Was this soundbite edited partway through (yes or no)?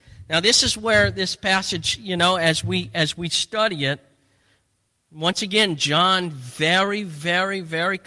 no